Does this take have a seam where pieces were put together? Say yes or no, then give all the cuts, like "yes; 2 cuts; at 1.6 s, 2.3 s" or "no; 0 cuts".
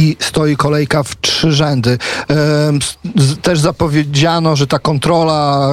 no; 0 cuts